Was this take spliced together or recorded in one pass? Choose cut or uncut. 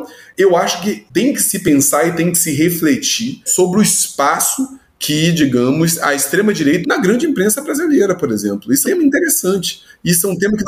cut